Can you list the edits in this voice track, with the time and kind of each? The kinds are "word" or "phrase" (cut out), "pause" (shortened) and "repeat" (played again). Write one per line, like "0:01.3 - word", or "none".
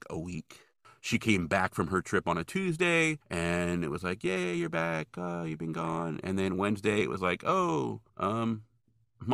0:03.2 - pause
0:08.1 - pause